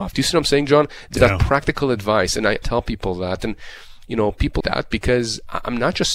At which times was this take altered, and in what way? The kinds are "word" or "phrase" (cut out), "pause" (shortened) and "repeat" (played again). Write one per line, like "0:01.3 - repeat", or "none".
0:01.2 - word
0:02.6 - word
0:04.6 - word